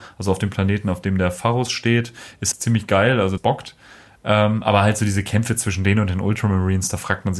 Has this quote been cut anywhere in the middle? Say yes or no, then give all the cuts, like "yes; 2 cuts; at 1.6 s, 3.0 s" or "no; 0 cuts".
yes; 2 cuts; at 2.5 s, 3.4 s